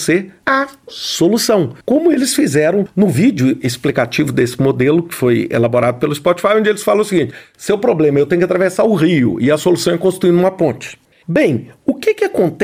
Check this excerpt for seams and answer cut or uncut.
cut